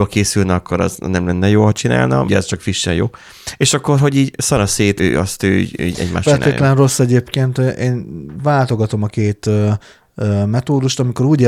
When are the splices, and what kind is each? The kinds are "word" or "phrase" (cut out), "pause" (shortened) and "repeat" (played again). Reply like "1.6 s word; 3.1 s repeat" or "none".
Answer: 2.3 s word; 5.0 s word; 6.2 s phrase